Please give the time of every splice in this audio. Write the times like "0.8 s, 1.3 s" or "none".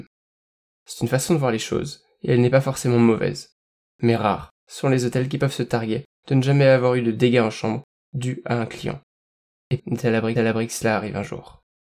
9.8 s, 10.4 s